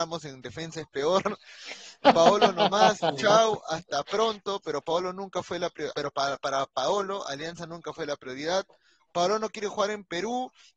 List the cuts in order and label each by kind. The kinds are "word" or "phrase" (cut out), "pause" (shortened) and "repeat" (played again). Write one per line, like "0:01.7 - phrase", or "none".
0:05.9 - word